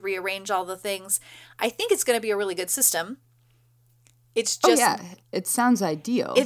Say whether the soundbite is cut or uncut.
uncut